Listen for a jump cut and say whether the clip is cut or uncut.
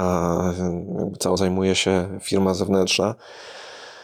cut